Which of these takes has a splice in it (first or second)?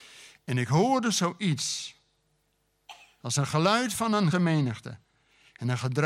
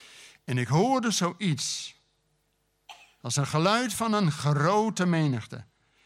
first